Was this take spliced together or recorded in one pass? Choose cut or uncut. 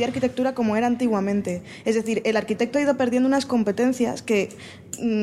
uncut